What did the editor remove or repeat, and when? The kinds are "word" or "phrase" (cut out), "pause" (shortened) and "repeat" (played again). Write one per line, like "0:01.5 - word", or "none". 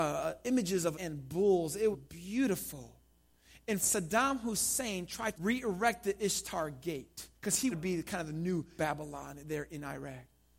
0:00.9 - phrase
0:01.9 - word
0:03.8 - word
0:05.3 - word
0:07.3 - pause
0:07.7 - word
0:08.8 - phrase